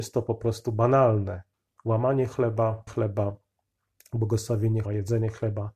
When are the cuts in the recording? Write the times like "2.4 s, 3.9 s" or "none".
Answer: 1.5 s, 2.9 s, 4.8 s